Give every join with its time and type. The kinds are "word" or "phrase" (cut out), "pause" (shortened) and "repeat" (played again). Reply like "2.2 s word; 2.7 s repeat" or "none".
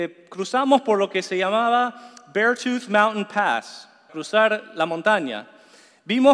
4.1 s word